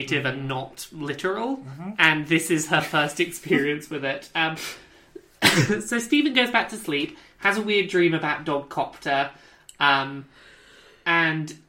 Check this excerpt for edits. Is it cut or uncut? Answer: uncut